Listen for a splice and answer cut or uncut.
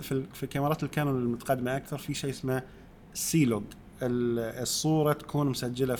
uncut